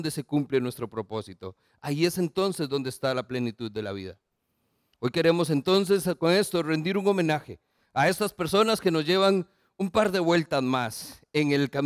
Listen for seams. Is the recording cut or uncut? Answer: uncut